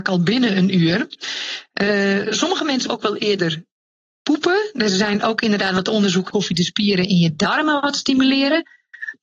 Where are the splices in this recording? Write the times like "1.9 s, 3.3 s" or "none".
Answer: 2.9 s, 6.3 s